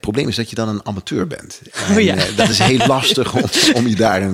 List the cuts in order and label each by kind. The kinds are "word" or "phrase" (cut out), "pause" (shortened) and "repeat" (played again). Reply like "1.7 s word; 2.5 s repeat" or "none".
none